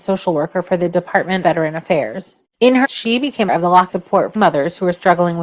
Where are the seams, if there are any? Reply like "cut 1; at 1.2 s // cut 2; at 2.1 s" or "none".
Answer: cut 1; at 1.4 s // cut 2; at 2.8 s // cut 3; at 3.5 s // cut 4; at 3.9 s // cut 5; at 4.4 s